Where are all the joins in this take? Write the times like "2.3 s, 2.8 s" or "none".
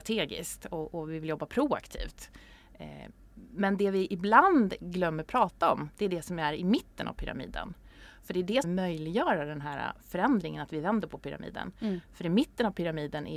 8.6 s